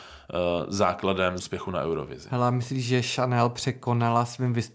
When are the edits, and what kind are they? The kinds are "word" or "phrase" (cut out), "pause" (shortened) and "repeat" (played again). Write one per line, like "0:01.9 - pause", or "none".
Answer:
0:01.4 - word